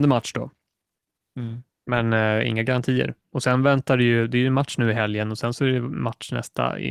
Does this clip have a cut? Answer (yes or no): no